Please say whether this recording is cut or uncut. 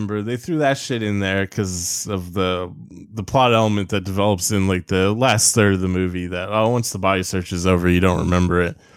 uncut